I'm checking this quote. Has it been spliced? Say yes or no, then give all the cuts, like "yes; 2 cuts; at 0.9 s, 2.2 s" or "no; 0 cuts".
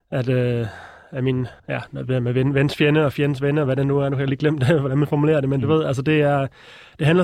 yes; 1 cut; at 1.6 s